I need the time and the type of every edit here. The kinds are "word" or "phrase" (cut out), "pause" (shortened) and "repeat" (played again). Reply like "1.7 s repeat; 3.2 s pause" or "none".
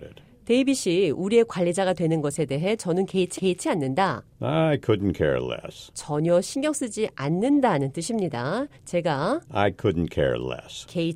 3.4 s repeat

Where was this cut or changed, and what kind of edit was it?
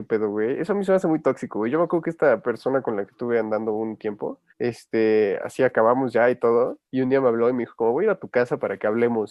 4.5 s pause; 6.9 s pause

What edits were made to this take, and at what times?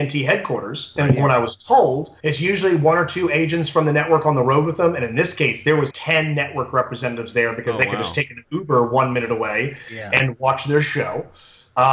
2.2 s pause; 5.9 s word

